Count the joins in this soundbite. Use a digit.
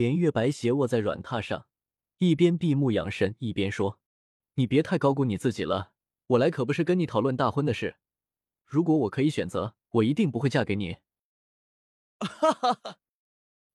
3